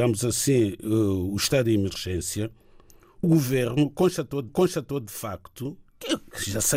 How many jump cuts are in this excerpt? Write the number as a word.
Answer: two